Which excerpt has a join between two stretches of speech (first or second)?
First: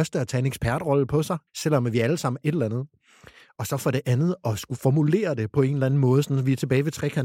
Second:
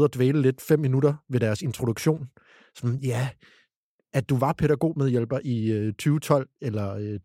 first